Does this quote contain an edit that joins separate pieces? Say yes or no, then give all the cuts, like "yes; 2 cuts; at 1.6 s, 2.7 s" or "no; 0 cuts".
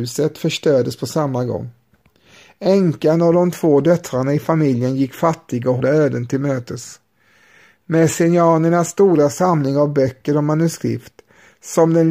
yes; 1 cut; at 5.8 s